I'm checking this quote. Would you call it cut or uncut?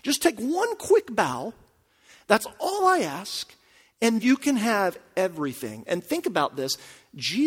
cut